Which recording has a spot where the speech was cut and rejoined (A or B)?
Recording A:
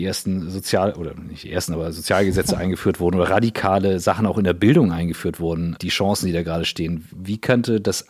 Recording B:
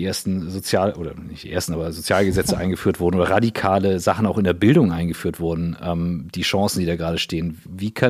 A